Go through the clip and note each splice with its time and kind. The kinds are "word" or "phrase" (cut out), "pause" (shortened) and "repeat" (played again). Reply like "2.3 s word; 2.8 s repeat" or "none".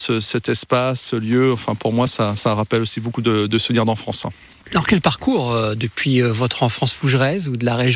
none